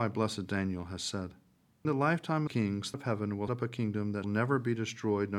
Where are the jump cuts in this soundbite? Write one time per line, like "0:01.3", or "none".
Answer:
0:01.8
0:02.5
0:02.9
0:03.5
0:04.2

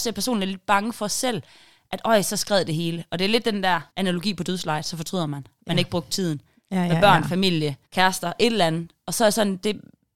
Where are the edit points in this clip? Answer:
0:03.9
0:07.8

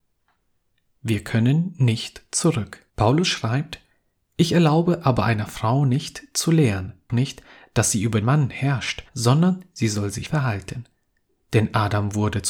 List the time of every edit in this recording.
0:02.9
0:07.1
0:08.2
0:09.1
0:10.3

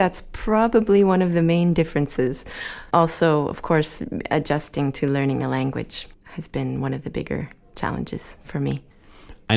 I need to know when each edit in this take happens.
none

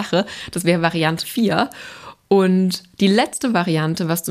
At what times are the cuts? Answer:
0:01.2

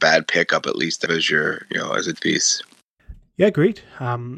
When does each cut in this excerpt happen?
0:01.1
0:02.1

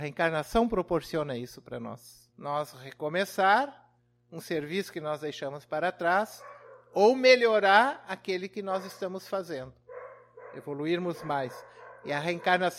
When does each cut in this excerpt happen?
0:02.3
0:04.0

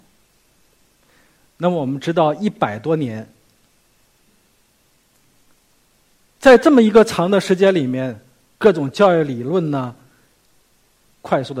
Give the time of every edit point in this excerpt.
none

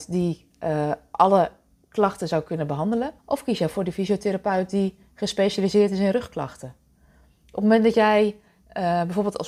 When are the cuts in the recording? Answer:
0:03.2

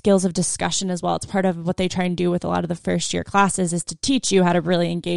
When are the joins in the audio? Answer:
none

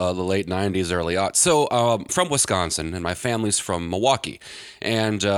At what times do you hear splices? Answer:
0:02.1

